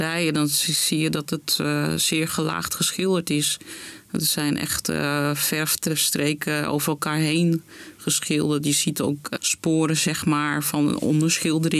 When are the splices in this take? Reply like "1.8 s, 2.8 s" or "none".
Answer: 9.4 s